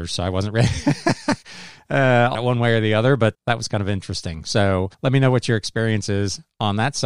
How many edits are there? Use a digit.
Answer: 3